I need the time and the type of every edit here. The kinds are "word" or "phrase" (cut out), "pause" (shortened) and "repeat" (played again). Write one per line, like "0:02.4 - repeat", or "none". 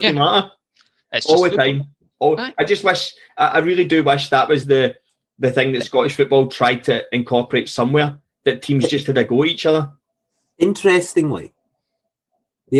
none